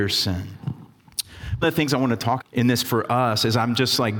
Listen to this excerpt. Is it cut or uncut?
cut